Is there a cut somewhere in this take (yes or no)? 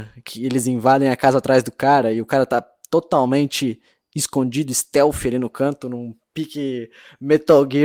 no